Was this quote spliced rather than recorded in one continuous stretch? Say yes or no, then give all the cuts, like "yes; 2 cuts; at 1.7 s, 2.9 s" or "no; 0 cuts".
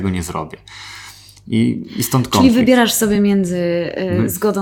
no; 0 cuts